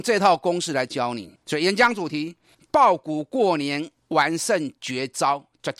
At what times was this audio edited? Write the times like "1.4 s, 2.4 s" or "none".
1.4 s